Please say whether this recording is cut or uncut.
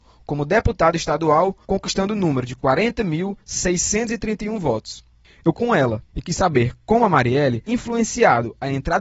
cut